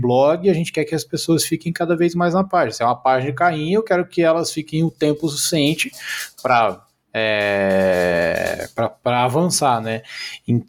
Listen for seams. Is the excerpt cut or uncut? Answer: uncut